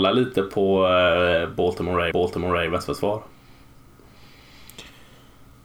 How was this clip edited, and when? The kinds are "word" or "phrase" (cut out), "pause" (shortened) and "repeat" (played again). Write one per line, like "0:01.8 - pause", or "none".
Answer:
0:02.1 - repeat